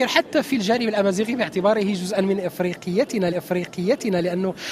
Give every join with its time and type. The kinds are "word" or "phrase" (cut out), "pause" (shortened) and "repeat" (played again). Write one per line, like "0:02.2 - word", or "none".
0:03.3 - repeat